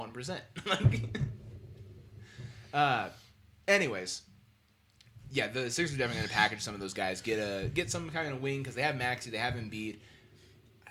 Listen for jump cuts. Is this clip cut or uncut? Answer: uncut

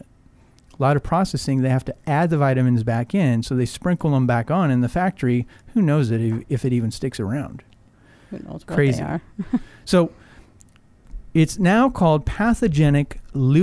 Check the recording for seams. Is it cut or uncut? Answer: uncut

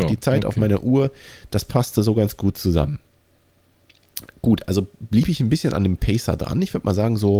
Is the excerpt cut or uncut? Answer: uncut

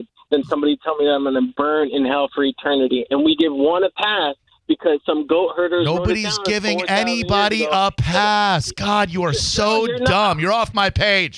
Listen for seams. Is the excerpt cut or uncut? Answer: uncut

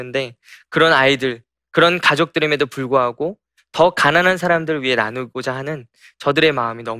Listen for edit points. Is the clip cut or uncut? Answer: uncut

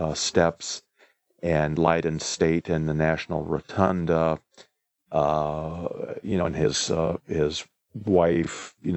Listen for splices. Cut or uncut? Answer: uncut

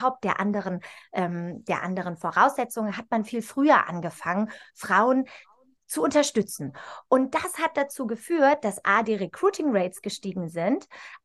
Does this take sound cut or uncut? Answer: uncut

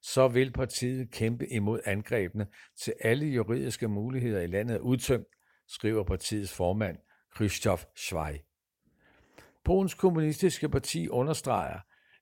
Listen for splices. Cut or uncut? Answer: uncut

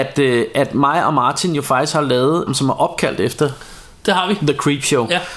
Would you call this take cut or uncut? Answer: cut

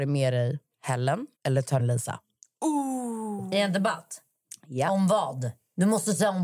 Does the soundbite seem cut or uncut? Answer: cut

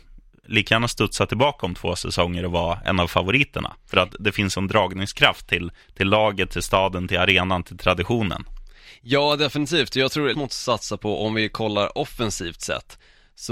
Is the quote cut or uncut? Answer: cut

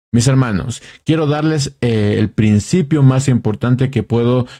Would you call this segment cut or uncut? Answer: uncut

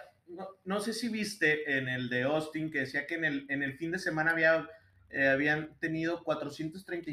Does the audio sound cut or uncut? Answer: uncut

